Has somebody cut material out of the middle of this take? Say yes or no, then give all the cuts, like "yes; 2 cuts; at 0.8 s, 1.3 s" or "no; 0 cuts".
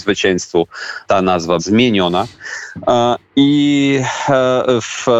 yes; 2 cuts; at 1.1 s, 1.6 s